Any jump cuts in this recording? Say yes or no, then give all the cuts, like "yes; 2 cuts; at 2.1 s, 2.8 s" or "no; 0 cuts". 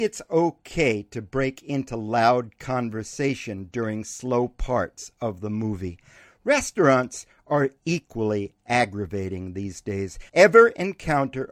yes; 1 cut; at 10.3 s